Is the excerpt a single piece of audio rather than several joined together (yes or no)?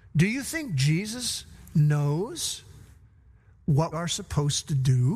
no